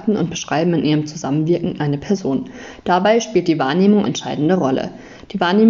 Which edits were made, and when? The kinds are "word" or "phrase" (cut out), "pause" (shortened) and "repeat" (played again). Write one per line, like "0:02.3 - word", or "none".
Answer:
0:04.1 - word